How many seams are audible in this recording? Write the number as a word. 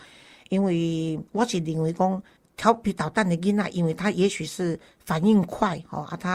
one